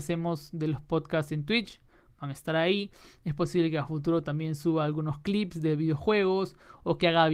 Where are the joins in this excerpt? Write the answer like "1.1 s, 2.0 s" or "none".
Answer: none